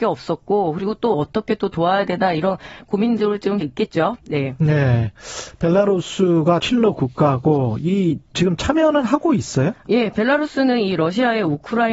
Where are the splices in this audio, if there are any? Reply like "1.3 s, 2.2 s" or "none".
1.1 s, 3.6 s, 6.6 s, 8.3 s